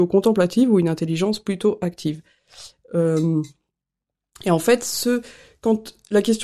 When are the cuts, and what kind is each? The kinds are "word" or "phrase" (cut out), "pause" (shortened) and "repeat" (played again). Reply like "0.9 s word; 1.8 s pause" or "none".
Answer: none